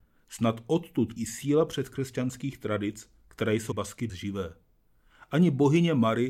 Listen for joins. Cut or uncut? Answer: cut